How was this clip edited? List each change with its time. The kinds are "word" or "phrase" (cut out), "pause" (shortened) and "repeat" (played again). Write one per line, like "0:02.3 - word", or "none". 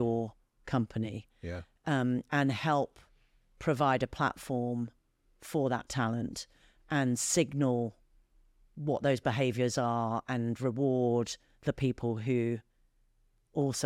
none